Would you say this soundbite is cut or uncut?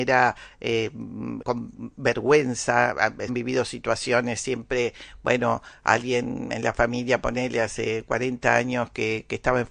cut